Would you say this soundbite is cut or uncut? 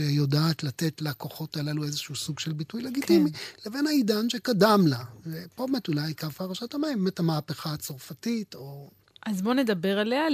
uncut